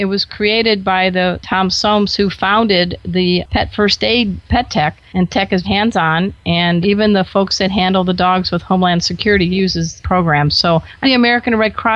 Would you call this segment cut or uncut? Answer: cut